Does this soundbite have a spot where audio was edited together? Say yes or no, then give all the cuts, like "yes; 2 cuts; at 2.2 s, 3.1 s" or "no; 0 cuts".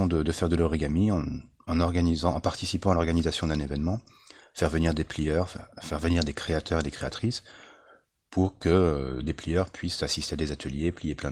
no; 0 cuts